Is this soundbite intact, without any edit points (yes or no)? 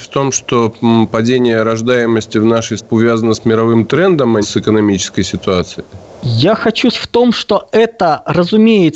no